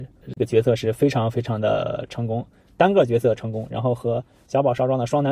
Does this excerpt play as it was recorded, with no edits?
yes; 0 cuts

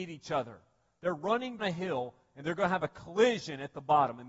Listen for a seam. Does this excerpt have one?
yes; 1 cut; at 1.6 s

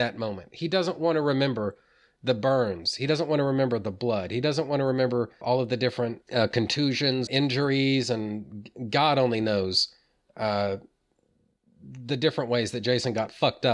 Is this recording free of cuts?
no; 3 cuts; at 5.4 s, 6.2 s, 7.3 s

